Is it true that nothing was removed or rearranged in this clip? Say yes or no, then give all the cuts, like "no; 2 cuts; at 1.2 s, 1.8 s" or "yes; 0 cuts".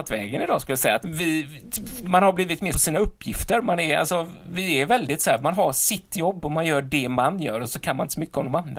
no; 2 cuts; at 1.0 s, 2.7 s